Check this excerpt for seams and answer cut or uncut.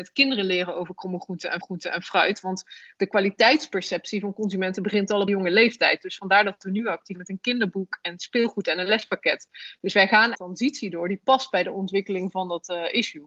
cut